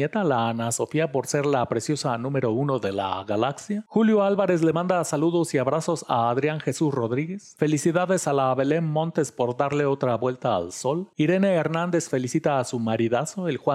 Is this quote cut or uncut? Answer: uncut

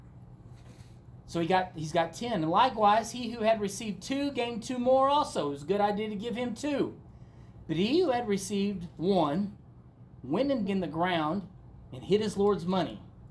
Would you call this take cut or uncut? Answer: cut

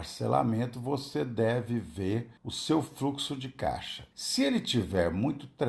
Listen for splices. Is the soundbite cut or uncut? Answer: cut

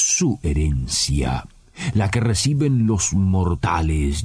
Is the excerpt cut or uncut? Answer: uncut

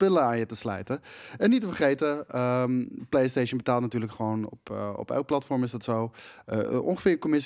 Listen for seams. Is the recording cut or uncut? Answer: uncut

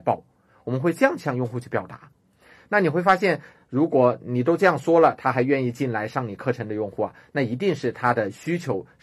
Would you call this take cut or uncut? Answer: uncut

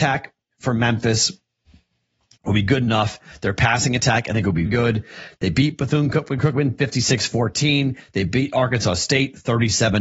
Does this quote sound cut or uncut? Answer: cut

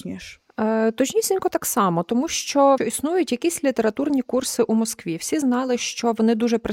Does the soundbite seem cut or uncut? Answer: cut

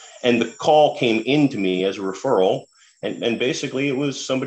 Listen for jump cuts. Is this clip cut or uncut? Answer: uncut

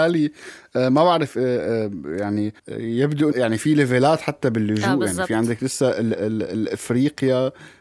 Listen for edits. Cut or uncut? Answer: cut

